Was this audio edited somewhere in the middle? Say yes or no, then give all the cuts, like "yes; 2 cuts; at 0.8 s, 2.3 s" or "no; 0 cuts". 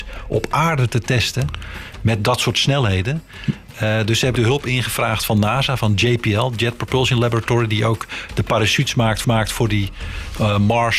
yes; 2 cuts; at 4.4 s, 9.2 s